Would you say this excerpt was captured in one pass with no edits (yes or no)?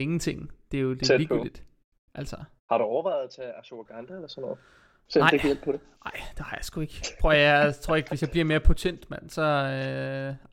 yes